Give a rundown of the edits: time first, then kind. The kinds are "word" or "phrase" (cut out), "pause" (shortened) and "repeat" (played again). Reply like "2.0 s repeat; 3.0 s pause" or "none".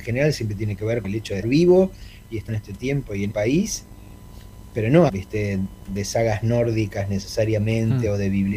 1.0 s word; 1.4 s word; 2.5 s word; 3.3 s word; 5.1 s word